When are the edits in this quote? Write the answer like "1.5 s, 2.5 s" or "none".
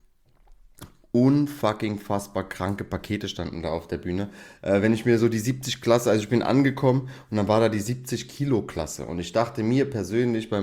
none